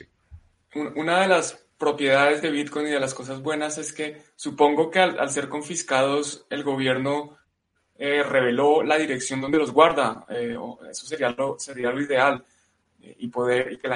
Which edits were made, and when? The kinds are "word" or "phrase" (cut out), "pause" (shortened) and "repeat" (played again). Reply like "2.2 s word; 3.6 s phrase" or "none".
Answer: none